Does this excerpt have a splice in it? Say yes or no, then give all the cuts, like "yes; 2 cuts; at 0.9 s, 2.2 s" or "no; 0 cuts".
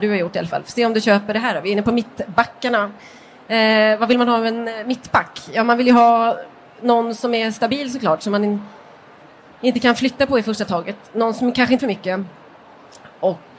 yes; 1 cut; at 11.8 s